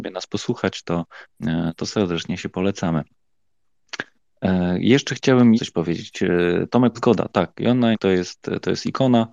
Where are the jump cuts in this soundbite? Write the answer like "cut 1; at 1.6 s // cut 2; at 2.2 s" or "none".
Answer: cut 1; at 5.6 s // cut 2; at 6.9 s // cut 3; at 7.9 s